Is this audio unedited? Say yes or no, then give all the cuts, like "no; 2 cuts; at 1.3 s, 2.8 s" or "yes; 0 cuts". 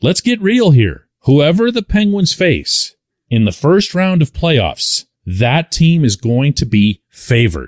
no; 3 cuts; at 1.2 s, 3.1 s, 5.1 s